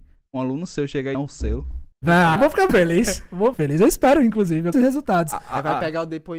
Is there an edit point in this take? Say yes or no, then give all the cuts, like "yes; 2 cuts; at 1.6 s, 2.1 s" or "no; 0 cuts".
yes; 6 cuts; at 1.1 s, 1.9 s, 2.4 s, 2.7 s, 3.5 s, 4.7 s